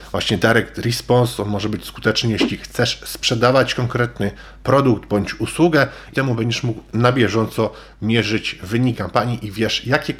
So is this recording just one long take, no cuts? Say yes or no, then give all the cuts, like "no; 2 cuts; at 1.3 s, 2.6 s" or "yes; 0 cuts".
no; 2 cuts; at 6.1 s, 8.9 s